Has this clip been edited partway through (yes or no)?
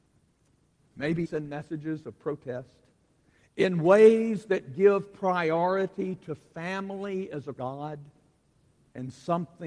yes